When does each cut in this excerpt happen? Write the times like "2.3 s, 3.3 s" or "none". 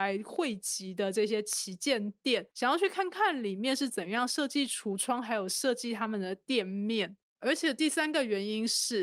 2.5 s, 7.3 s